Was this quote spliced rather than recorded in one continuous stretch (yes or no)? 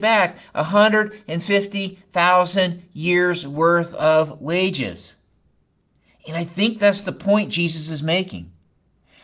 no